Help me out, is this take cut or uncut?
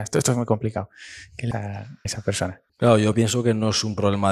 cut